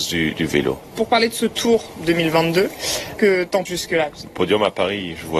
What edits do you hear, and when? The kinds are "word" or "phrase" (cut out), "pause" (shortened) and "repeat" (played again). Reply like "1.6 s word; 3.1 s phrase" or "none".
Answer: 3.2 s word; 3.7 s word